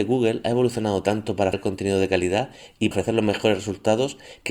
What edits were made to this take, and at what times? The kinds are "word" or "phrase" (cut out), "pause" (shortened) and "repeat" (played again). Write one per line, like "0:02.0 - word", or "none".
0:01.5 - word
0:02.9 - word